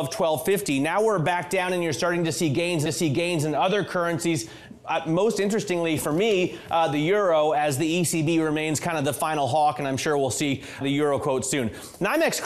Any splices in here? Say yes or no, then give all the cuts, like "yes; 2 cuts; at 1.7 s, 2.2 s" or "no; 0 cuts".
yes; 2 cuts; at 2.9 s, 10.8 s